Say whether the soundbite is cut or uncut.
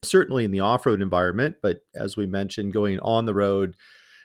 uncut